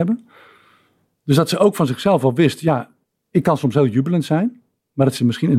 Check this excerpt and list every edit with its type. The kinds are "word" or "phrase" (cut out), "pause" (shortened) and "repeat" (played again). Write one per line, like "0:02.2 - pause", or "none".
0:03.1 - pause